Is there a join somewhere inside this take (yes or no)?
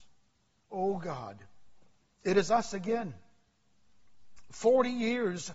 no